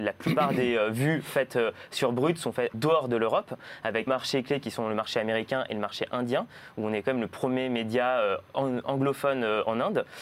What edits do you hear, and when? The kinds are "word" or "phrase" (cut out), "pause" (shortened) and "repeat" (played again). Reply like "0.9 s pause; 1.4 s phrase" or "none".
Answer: 2.7 s word; 4.1 s word